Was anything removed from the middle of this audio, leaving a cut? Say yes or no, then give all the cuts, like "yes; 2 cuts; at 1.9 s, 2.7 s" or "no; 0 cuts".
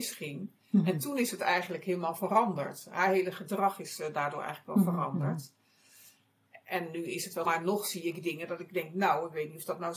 yes; 1 cut; at 7.4 s